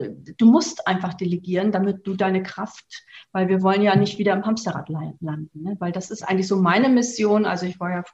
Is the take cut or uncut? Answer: uncut